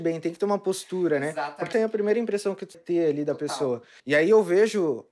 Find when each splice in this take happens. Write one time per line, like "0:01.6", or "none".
0:01.7
0:02.7
0:04.0

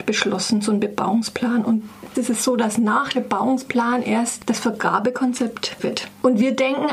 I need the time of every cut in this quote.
0:02.1
0:03.1
0:05.8

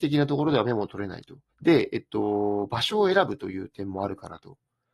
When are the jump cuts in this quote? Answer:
0:01.5

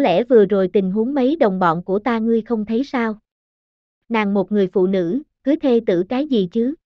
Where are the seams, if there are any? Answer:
none

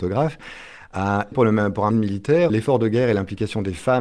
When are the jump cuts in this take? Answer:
0:01.3
0:01.9
0:02.5

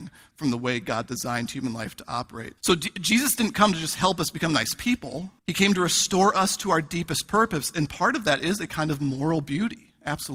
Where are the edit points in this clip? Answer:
0:02.6
0:05.4

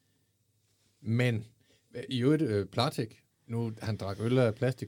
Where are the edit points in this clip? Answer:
0:03.3

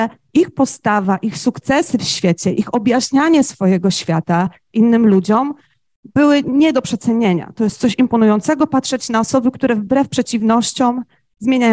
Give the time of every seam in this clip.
none

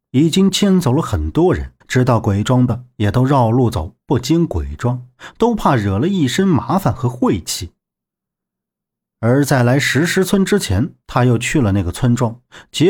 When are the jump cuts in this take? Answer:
0:01.8
0:11.0

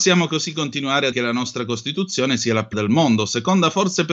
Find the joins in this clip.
0:01.1
0:02.7

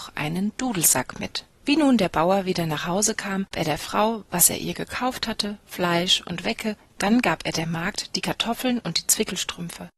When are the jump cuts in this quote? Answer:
0:01.5
0:03.5

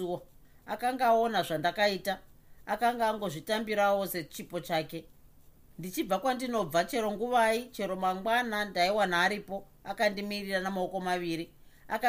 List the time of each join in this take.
none

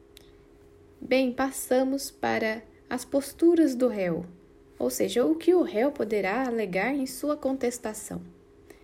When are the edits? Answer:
none

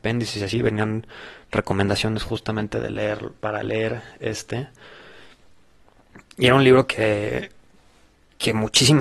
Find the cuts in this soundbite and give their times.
none

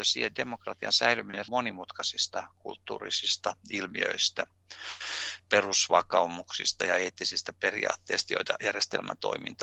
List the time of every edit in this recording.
0:01.5

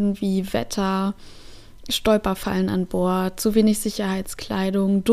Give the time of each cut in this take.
none

